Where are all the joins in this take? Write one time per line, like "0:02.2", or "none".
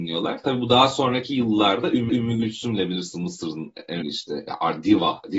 0:02.1
0:04.0

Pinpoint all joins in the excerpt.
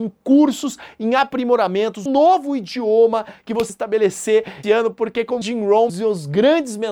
0:02.1
0:03.7
0:04.6
0:05.4
0:05.9

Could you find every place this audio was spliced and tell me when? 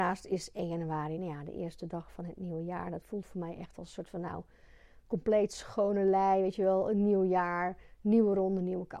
none

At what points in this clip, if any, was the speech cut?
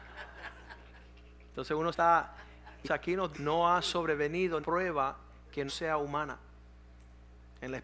0:01.9
0:02.8
0:03.3
0:04.6
0:05.7

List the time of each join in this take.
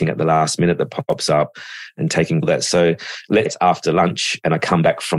0:02.4
0:03.5

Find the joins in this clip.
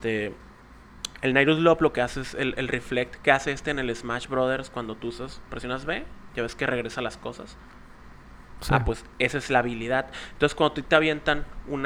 none

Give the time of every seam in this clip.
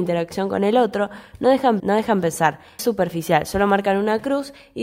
0:01.8
0:02.8

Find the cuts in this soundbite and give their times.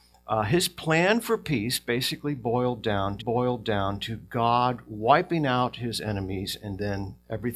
0:03.2

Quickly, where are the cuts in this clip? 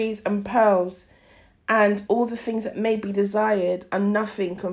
none

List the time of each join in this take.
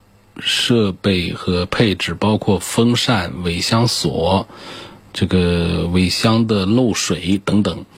none

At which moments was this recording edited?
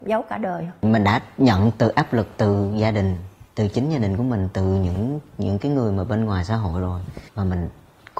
0:07.3

